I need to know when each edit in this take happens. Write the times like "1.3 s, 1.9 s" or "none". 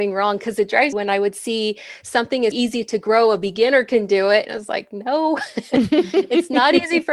0.9 s, 2.5 s

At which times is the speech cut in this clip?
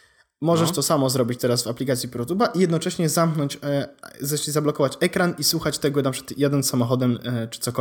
none

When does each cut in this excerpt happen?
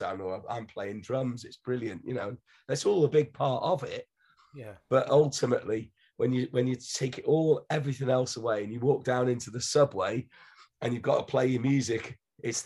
none

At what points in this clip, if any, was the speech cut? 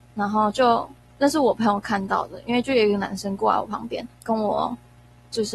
4.1 s

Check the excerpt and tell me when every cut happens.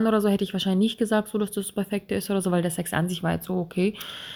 none

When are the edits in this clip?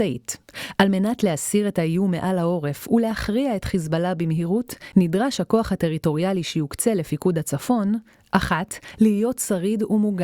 none

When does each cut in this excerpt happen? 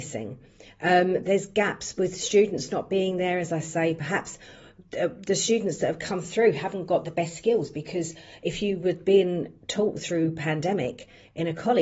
none

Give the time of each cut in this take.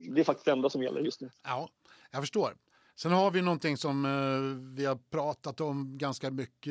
none

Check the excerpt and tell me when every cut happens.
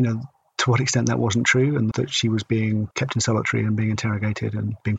1.9 s, 2.9 s

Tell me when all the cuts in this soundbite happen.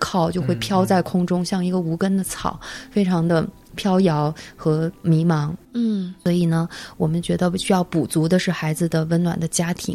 5.6 s

